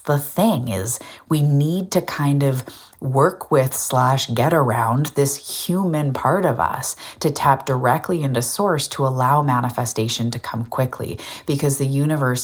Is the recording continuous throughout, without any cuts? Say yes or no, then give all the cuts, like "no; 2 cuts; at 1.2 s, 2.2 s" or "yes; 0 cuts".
yes; 0 cuts